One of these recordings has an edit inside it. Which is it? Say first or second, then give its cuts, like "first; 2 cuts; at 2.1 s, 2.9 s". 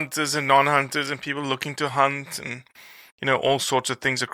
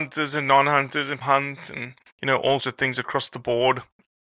second; 3 cuts; at 1.2 s, 2.1 s, 2.6 s